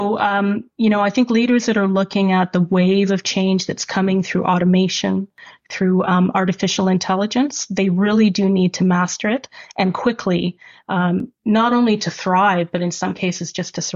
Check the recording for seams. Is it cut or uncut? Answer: uncut